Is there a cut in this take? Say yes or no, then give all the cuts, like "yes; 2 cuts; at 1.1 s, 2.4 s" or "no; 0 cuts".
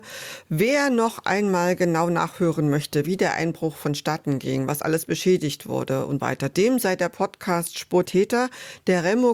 yes; 2 cuts; at 6.2 s, 8.0 s